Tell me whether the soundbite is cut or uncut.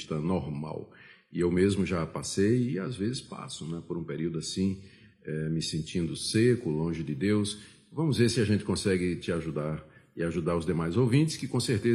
uncut